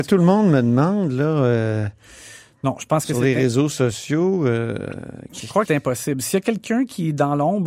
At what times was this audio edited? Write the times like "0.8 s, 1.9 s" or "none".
5.7 s